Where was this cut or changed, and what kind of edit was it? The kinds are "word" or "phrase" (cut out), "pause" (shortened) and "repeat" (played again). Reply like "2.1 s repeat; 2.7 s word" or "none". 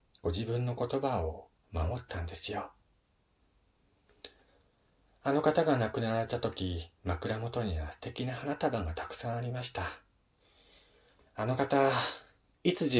1.6 s pause; 6.9 s pause